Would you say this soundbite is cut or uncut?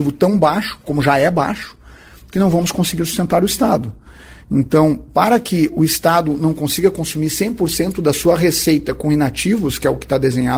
uncut